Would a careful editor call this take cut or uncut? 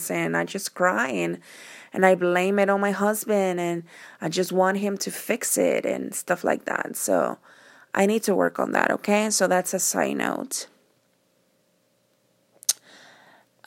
uncut